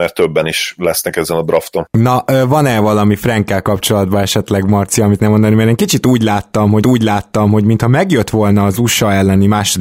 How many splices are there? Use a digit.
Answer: 2